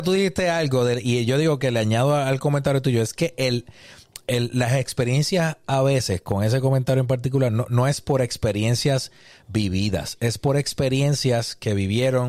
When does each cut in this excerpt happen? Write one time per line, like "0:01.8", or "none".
none